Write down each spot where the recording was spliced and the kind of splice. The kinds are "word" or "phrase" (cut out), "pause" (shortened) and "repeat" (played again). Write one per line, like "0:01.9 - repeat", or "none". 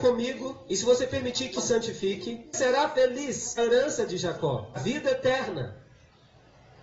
0:01.6 - word
0:02.5 - word
0:03.6 - phrase
0:04.7 - phrase